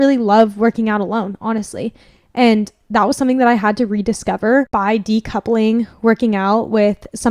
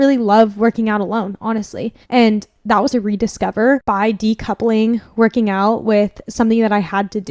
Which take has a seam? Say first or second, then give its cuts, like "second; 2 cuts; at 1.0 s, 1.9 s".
second; 2 cuts; at 2.0 s, 2.9 s